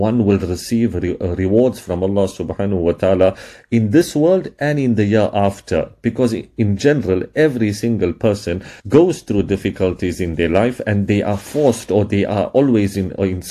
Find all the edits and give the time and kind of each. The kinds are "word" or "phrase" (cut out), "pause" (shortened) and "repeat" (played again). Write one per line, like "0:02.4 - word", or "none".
0:08.8 - pause